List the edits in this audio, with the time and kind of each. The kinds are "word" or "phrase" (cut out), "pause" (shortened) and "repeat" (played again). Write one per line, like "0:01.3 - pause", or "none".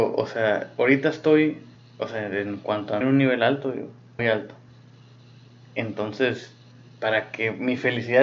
0:01.7 - pause
0:03.0 - phrase
0:04.2 - word

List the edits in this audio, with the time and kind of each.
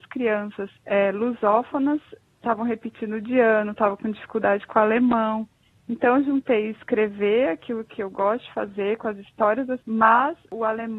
0:09.8 - word

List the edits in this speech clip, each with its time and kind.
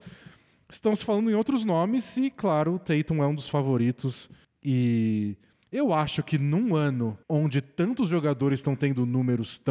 0:07.2 - pause

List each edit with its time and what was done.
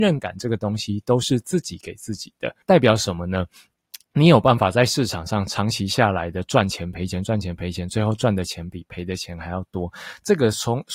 0:02.6 - pause

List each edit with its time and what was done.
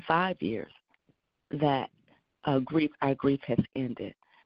none

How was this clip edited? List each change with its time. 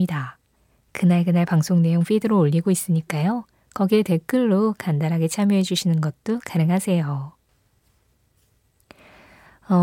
none

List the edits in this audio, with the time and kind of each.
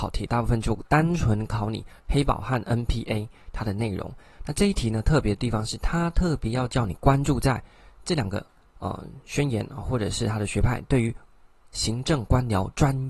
0:02.0 - pause

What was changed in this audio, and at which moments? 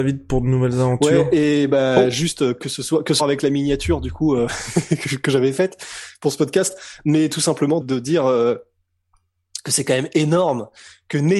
0:03.2 - phrase
0:07.8 - word

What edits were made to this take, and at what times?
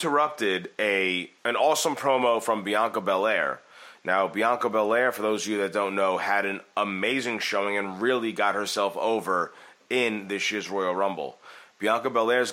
0:01.4 - pause

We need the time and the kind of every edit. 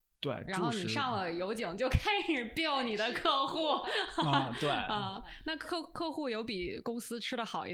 none

